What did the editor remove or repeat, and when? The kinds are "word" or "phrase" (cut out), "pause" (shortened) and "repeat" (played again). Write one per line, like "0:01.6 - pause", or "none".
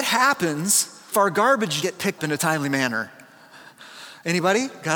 0:01.1 - word
0:01.8 - word
0:02.2 - word